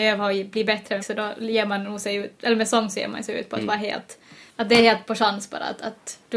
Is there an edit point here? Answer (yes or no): yes